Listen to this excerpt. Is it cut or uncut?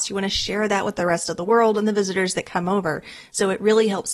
uncut